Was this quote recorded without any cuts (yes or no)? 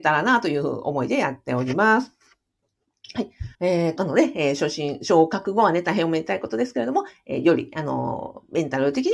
no